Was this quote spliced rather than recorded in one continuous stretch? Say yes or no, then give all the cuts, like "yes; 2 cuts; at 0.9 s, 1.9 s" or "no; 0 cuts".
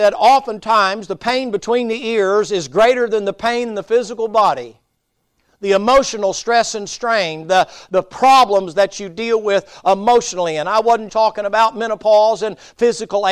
yes; 1 cut; at 11.1 s